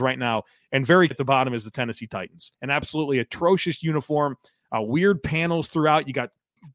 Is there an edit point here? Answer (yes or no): yes